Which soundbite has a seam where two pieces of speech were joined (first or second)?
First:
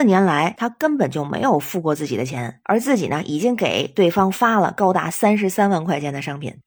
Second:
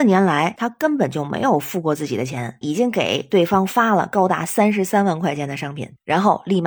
second